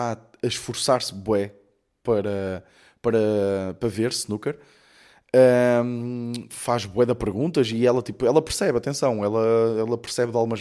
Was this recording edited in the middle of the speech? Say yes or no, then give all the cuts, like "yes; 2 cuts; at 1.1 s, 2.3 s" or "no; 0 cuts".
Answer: no; 0 cuts